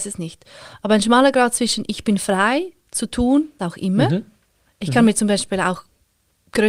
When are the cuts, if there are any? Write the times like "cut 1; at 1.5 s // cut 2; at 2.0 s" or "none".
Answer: cut 1; at 3.6 s